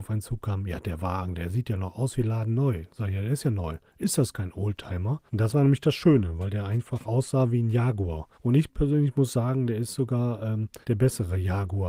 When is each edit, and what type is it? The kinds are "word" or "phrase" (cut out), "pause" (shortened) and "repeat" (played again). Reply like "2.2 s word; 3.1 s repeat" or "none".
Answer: 3.9 s pause; 5.3 s pause; 8.3 s pause; 10.8 s pause